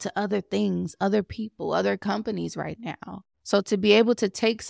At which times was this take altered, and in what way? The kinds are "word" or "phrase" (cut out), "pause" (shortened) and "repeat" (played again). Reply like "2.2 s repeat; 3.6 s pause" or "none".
3.3 s pause